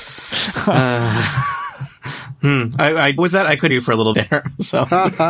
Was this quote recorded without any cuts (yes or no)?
no